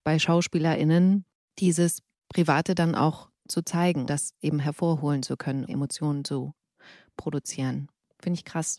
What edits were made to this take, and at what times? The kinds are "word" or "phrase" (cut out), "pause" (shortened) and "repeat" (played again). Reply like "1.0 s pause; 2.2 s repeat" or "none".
4.1 s word; 5.7 s word

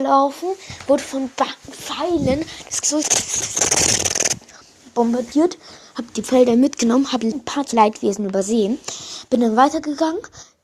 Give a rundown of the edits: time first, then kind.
2.8 s word; 7.3 s word; 7.7 s word

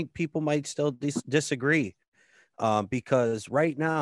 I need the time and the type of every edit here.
none

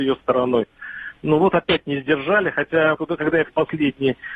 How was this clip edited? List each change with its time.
2.9 s word; 3.4 s word

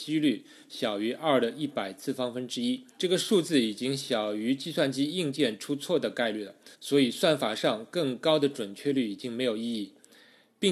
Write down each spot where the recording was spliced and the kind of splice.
2.9 s pause; 6.7 s pause

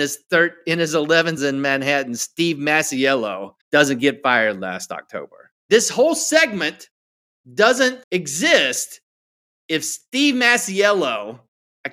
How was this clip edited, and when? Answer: 1.4 s word; 3.6 s pause; 5.6 s pause; 8.0 s pause

